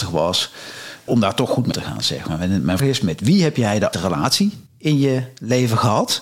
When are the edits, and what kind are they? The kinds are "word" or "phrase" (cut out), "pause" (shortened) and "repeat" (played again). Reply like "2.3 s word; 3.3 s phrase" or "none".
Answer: 1.1 s word; 1.7 s word; 2.8 s word; 3.9 s word; 4.7 s pause